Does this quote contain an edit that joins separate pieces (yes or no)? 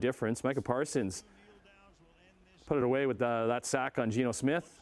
no